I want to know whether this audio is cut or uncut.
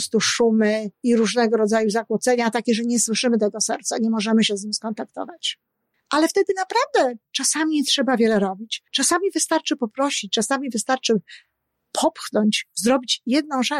cut